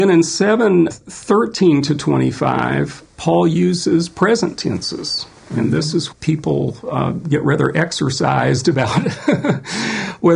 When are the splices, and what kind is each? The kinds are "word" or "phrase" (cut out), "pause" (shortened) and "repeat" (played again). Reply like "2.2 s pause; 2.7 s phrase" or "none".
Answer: 0.9 s word; 6.1 s phrase